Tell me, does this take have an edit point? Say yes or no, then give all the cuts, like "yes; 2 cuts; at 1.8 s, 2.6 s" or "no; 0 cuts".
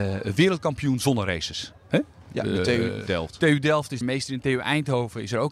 yes; 2 cuts; at 3.1 s, 4.0 s